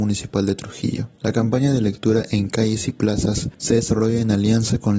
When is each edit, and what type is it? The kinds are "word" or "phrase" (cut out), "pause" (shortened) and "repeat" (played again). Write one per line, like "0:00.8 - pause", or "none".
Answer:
0:01.1 - pause
0:03.5 - pause